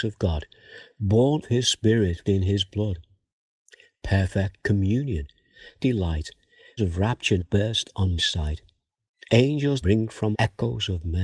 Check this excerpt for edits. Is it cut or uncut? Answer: cut